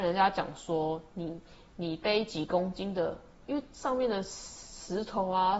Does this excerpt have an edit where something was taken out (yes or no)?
no